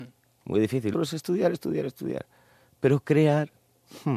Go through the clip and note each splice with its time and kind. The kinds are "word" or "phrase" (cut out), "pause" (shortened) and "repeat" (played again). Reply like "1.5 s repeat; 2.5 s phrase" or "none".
0.9 s word; 1.5 s word

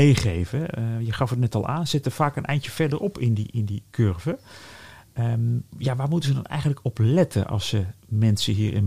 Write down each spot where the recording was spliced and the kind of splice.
5.7 s pause

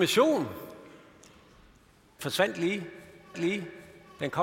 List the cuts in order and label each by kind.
2.2 s word; 3.3 s repeat

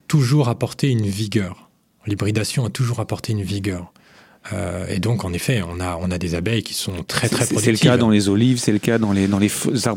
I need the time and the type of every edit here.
none

